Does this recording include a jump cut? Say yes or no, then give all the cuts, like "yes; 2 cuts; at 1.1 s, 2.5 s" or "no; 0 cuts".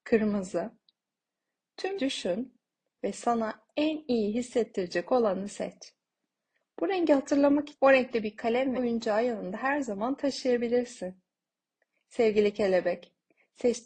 yes; 3 cuts; at 2.0 s, 7.7 s, 8.8 s